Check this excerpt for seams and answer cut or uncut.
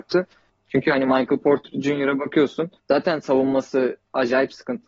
cut